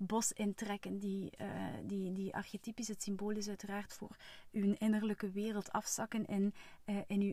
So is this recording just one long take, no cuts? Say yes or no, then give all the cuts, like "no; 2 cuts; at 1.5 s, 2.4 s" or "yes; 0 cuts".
yes; 0 cuts